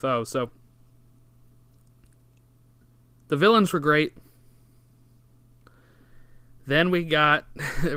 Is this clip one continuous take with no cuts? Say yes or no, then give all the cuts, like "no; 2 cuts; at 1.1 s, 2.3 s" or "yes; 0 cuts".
yes; 0 cuts